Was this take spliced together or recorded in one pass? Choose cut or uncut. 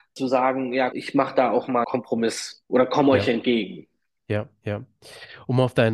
cut